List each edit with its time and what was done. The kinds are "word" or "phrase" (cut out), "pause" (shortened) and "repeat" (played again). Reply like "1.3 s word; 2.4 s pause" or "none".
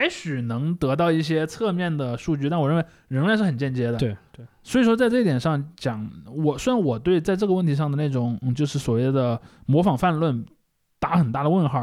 none